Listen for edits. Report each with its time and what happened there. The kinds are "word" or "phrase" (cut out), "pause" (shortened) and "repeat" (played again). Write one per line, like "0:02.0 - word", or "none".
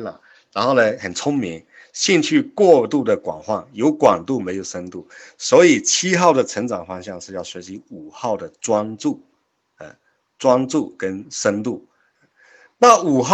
none